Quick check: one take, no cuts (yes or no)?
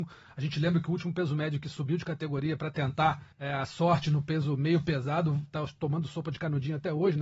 no